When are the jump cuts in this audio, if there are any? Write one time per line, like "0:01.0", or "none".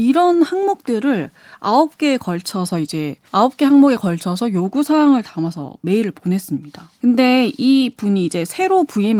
0:03.2
0:07.0